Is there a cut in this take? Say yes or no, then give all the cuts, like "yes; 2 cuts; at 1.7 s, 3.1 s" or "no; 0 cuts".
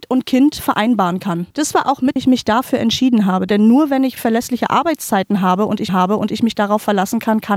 yes; 3 cuts; at 2.2 s, 4.2 s, 5.9 s